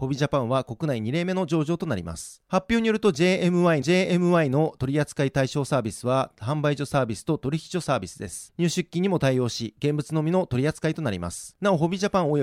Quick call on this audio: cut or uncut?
cut